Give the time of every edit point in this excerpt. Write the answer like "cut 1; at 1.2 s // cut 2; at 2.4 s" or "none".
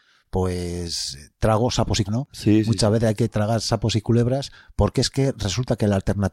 cut 1; at 2.1 s